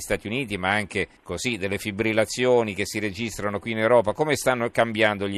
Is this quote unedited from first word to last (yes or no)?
no